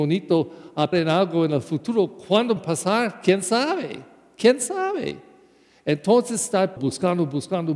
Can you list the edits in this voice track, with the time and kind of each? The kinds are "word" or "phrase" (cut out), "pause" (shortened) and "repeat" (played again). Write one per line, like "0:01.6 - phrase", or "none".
0:00.9 - word
0:02.6 - word
0:06.8 - word